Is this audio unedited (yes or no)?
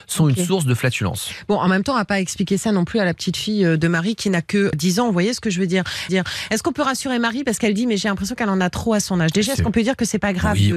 no